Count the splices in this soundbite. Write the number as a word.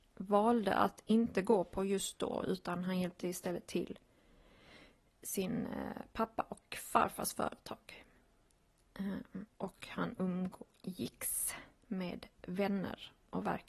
zero